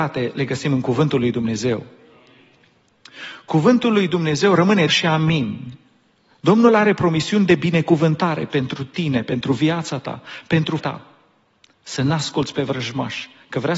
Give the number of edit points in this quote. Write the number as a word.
two